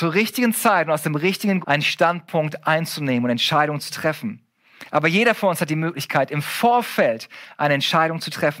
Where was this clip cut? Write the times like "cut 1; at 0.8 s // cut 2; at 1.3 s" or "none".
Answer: cut 1; at 1.6 s